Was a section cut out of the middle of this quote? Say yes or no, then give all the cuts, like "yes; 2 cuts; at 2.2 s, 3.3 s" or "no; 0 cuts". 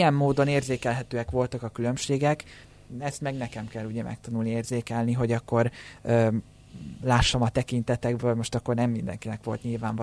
no; 0 cuts